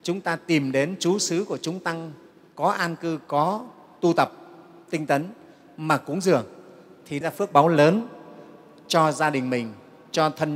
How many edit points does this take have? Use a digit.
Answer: 1